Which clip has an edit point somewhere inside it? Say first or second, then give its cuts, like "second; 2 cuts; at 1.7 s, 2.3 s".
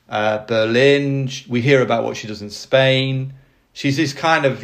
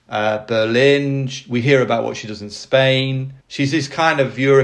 second; 1 cut; at 3.4 s